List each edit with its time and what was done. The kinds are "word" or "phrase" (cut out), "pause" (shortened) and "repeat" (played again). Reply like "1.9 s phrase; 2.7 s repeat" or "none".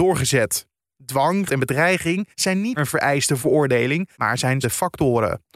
1.5 s word; 2.3 s pause; 2.8 s word; 3.4 s phrase; 4.1 s pause; 4.6 s word